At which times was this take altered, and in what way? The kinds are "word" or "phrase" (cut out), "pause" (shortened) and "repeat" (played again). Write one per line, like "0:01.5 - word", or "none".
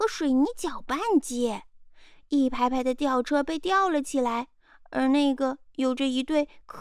none